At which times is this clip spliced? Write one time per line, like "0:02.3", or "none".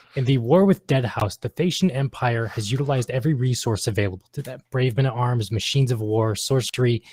none